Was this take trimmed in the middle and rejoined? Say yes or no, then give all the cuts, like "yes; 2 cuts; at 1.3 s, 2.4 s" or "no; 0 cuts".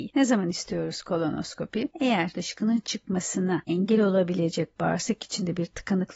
no; 0 cuts